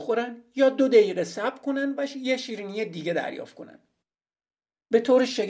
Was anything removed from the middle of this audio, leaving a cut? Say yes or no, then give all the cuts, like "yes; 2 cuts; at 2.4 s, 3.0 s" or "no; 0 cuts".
no; 0 cuts